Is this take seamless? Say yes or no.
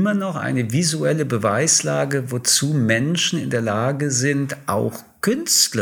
yes